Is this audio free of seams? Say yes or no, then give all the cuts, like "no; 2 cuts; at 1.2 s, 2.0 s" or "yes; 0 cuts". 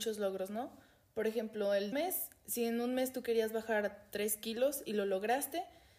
no; 1 cut; at 1.9 s